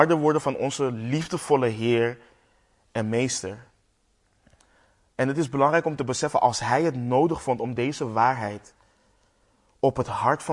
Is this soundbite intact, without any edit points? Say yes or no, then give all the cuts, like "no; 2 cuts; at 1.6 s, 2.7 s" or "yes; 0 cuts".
yes; 0 cuts